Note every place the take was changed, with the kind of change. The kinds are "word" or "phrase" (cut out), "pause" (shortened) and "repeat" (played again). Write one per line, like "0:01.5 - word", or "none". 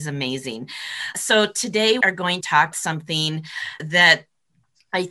0:01.1 - word
0:02.0 - word
0:02.4 - word
0:02.7 - word